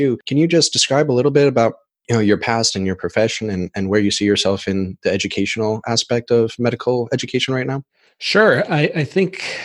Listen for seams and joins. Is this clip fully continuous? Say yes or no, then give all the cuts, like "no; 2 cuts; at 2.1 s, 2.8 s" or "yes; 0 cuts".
yes; 0 cuts